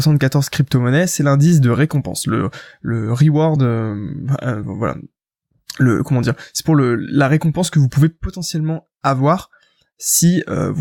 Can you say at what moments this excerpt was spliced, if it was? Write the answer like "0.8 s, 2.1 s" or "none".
none